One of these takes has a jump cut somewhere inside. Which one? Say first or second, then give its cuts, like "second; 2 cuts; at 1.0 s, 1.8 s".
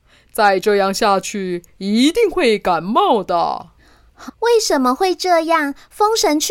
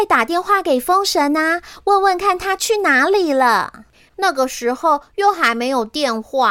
first; 1 cut; at 4.3 s